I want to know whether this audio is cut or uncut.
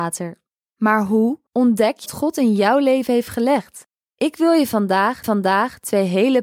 cut